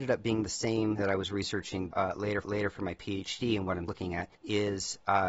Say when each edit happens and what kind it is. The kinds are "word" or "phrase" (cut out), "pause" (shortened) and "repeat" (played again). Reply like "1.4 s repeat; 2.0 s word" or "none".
1.0 s word; 1.9 s word; 2.4 s repeat; 3.9 s word; 4.3 s pause